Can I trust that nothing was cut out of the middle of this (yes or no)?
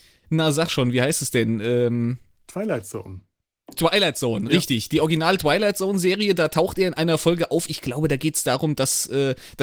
yes